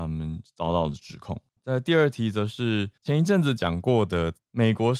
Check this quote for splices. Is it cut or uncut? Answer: cut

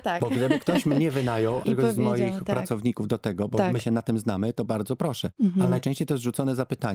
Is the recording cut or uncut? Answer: cut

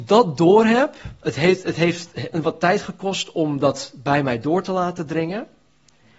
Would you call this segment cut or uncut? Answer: uncut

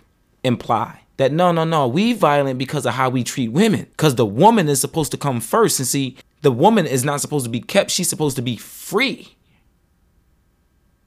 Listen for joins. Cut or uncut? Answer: cut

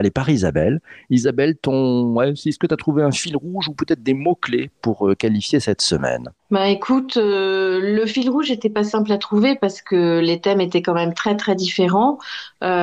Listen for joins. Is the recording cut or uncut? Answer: cut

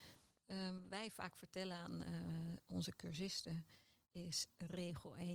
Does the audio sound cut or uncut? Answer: uncut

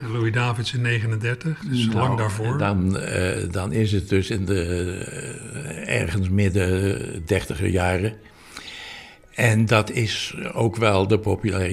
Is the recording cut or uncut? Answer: uncut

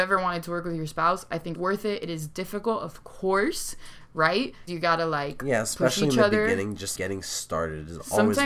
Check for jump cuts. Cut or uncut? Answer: cut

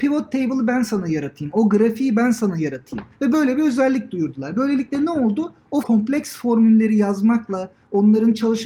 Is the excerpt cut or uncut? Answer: cut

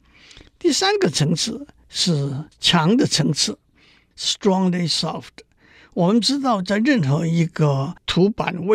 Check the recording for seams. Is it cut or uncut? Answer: uncut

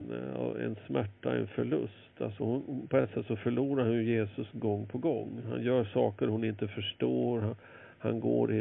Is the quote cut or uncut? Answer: uncut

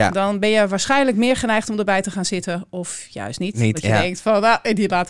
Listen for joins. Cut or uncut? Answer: uncut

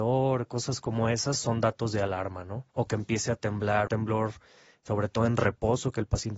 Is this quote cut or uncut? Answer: cut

